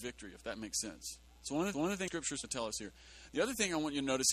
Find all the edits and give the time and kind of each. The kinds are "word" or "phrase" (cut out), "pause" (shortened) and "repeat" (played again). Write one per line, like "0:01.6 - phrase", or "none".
0:01.3 - pause
0:01.7 - repeat
0:02.1 - word
0:02.4 - word

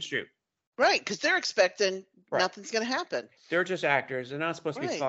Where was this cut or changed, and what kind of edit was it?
0:03.4 - pause

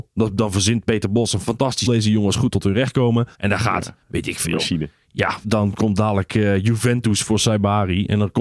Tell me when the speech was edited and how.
0:01.9 - phrase
0:03.3 - pause
0:05.4 - word

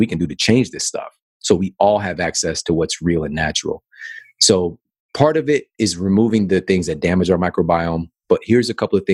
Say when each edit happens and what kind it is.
none

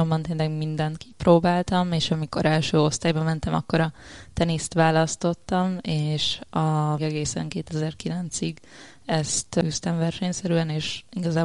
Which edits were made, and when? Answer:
0:07.0 - word

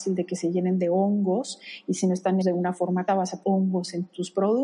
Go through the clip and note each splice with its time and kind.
0:02.4 - word
0:03.1 - word
0:03.4 - word

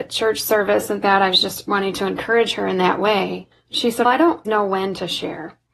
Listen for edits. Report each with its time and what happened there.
0:01.0 - phrase
0:03.5 - pause
0:04.0 - word
0:04.4 - word

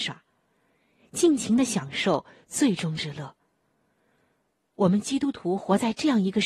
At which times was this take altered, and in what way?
none

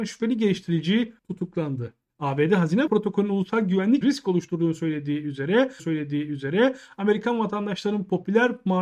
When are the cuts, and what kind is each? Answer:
0:01.2 - pause
0:02.9 - word
0:04.0 - word
0:05.8 - repeat

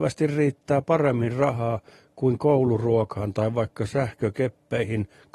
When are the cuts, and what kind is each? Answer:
none

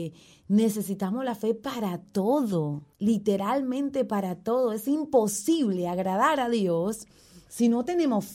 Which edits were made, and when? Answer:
0:02.9 - pause

